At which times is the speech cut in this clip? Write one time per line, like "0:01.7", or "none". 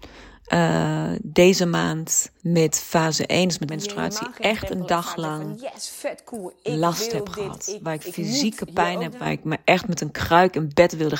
0:02.4
0:03.7
0:09.1